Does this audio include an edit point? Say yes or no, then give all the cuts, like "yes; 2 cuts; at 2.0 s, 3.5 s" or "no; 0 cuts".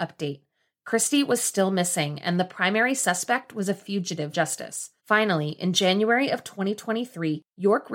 yes; 2 cuts; at 4.3 s, 5.0 s